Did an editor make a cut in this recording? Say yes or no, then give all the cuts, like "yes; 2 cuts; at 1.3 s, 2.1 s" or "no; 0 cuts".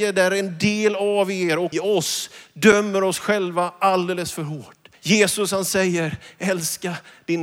yes; 2 cuts; at 1.7 s, 4.9 s